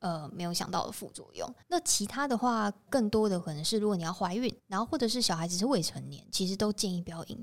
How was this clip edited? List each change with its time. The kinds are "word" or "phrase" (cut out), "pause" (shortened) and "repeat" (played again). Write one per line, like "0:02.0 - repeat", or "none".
0:01.6 - pause
0:02.9 - word
0:04.6 - pause